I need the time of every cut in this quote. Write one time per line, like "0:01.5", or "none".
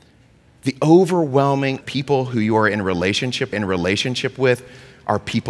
0:01.8
0:03.5